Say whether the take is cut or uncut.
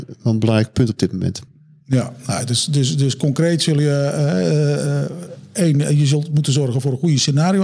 uncut